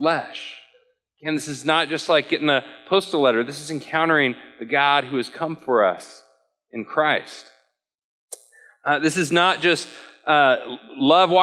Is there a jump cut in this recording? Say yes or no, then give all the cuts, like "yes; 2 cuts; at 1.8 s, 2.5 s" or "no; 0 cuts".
no; 0 cuts